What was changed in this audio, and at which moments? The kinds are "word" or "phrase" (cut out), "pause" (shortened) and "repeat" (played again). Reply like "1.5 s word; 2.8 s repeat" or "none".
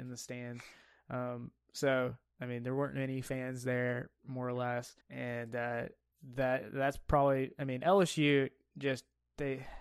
5.0 s pause